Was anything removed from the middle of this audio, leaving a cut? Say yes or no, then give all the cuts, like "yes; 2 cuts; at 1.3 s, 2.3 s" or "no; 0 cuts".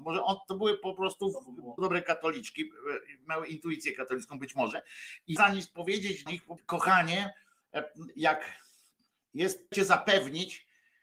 yes; 5 cuts; at 1.8 s, 5.4 s, 6.3 s, 6.6 s, 9.7 s